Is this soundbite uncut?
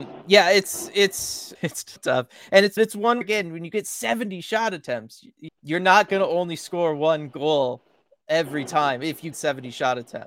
no; 6 cuts; at 1.5 s, 2.0 s, 2.8 s, 3.2 s, 5.5 s, 9.3 s

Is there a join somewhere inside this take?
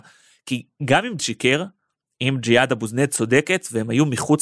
yes; 1 cut; at 1.2 s

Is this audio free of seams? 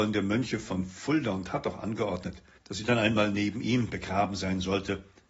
no; 1 cut; at 2.6 s

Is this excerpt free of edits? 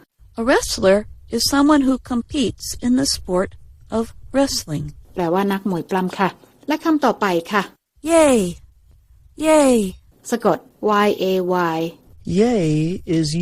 yes; 0 cuts

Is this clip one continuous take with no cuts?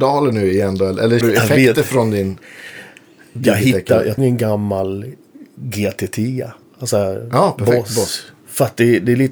no; 3 cuts; at 1.2 s, 4.2 s, 8.4 s

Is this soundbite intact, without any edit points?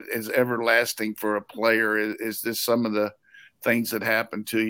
yes; 0 cuts

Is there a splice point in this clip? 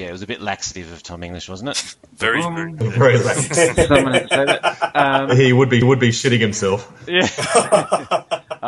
yes; 1 cut; at 5.8 s

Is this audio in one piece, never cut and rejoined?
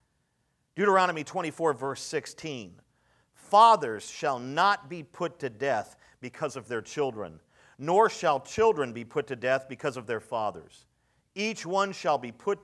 yes; 0 cuts

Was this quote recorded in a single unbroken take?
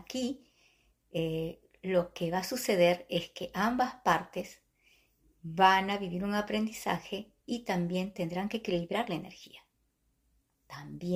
yes; 0 cuts

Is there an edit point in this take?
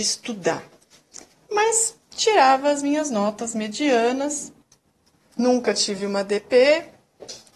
no; 0 cuts

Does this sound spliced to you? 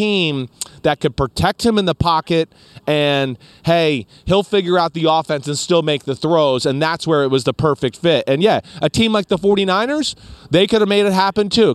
no; 0 cuts

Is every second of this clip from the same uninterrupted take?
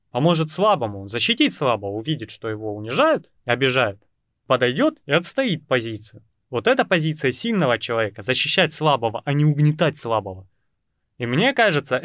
no; 2 cuts; at 3.4 s, 4.2 s

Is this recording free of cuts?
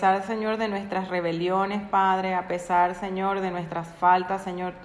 yes; 0 cuts

